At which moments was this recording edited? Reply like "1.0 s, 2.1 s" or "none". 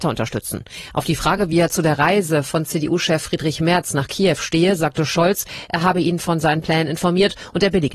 none